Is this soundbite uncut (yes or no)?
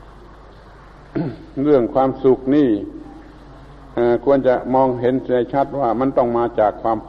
yes